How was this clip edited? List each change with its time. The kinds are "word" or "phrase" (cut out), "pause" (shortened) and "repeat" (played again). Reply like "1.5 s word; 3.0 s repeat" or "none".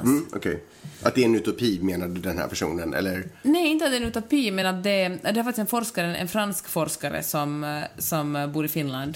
none